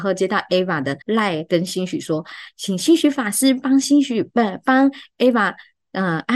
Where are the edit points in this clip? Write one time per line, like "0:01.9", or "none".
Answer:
0:01.0

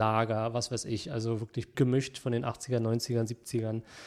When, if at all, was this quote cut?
0:01.7

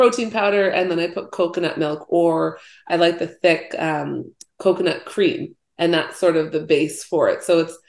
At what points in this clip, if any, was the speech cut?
none

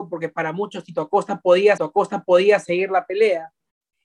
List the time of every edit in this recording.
0:01.8

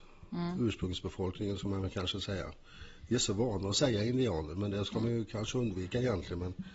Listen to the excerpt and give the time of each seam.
none

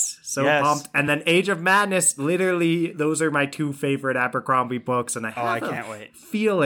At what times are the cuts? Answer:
none

